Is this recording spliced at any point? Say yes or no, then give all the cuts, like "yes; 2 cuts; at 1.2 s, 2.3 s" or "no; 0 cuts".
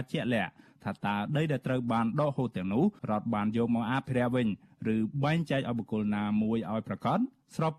yes; 1 cut; at 3.0 s